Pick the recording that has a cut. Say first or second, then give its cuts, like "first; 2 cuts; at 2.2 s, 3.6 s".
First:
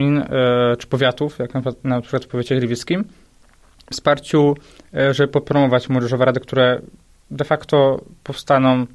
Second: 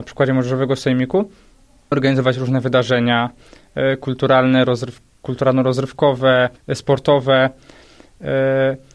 second; 2 cuts; at 1.9 s, 6.6 s